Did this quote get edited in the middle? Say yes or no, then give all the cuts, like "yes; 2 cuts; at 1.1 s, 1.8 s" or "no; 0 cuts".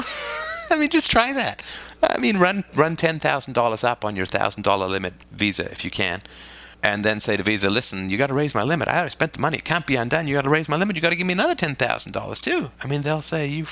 yes; 3 cuts; at 5.2 s, 6.7 s, 12.7 s